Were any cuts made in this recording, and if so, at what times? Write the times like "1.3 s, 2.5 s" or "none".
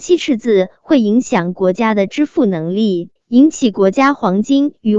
3.2 s